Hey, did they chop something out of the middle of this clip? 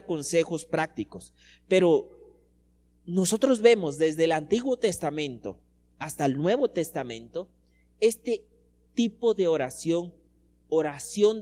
no; 0 cuts

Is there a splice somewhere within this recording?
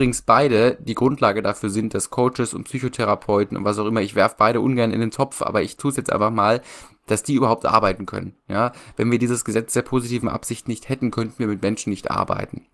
no; 0 cuts

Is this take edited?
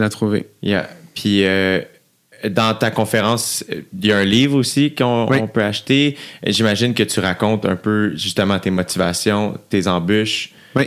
no; 0 cuts

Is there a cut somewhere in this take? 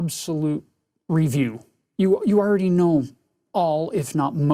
no; 0 cuts

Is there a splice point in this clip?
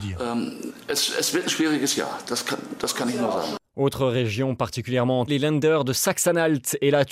yes; 1 cut; at 5.3 s

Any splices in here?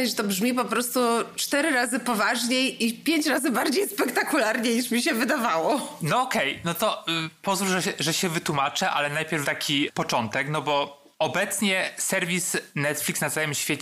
yes; 1 cut; at 9.4 s

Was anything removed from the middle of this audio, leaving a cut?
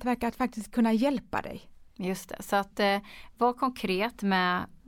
no; 0 cuts

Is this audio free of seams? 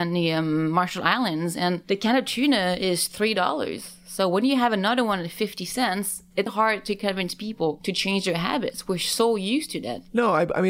no; 1 cut; at 6.5 s

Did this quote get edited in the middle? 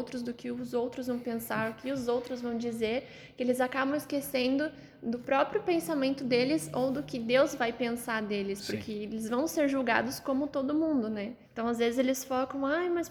yes; 1 cut; at 11.4 s

